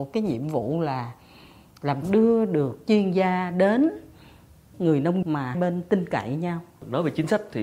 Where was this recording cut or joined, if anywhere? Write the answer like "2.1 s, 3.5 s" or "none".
2.0 s, 2.9 s, 4.7 s, 5.2 s, 5.5 s